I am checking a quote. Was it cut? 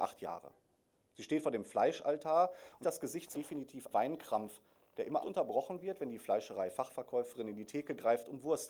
yes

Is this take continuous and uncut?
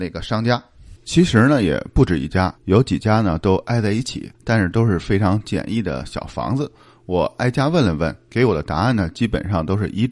no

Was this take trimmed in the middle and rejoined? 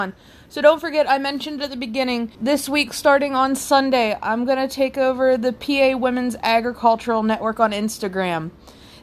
yes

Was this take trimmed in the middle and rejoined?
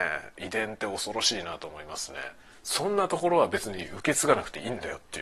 yes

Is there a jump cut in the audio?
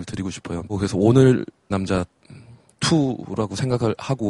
yes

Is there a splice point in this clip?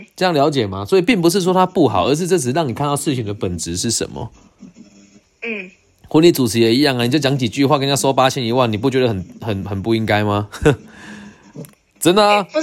no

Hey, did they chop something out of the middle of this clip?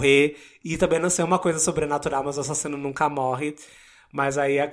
no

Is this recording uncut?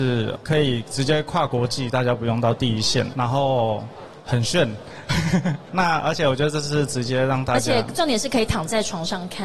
no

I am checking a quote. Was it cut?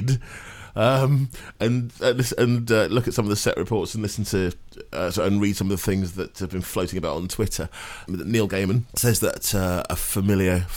no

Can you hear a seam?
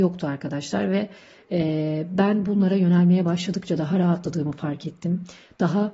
no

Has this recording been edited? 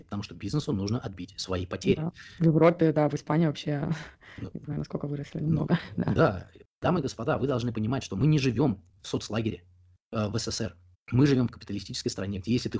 yes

